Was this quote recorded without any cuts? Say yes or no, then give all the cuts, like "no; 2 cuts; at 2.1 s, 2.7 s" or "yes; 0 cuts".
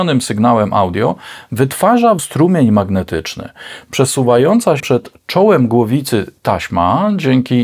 no; 2 cuts; at 2.2 s, 4.8 s